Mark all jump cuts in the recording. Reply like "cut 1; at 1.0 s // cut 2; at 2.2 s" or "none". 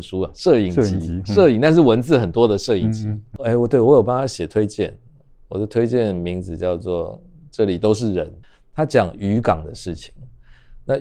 none